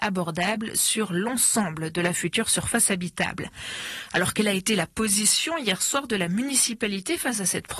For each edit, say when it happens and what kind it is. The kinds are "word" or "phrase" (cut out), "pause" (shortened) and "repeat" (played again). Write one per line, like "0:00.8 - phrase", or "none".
none